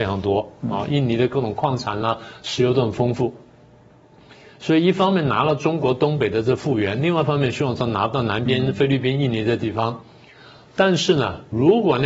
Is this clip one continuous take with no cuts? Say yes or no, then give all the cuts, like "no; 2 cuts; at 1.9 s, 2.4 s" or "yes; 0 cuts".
yes; 0 cuts